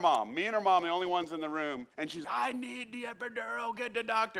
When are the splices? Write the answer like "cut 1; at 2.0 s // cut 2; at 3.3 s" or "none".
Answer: cut 1; at 1.9 s // cut 2; at 2.2 s